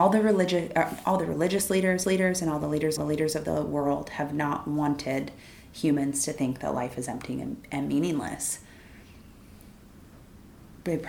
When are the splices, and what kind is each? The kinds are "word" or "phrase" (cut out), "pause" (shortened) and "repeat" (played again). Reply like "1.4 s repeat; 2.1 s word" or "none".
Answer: 2.0 s repeat; 3.0 s repeat